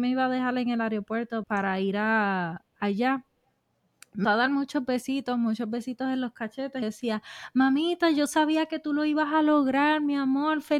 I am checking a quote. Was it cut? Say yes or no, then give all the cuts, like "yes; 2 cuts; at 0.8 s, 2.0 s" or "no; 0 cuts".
yes; 3 cuts; at 1.4 s, 4.2 s, 6.8 s